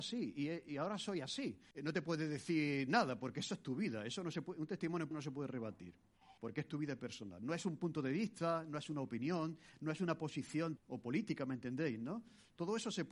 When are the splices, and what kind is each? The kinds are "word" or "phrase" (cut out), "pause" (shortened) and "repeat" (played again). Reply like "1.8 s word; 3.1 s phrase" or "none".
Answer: 1.7 s pause; 5.1 s word; 6.4 s pause; 10.8 s word